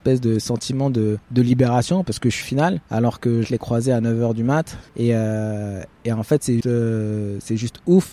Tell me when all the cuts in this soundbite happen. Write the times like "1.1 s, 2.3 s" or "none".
1.2 s, 2.4 s, 2.9 s, 3.4 s, 4.9 s, 6.6 s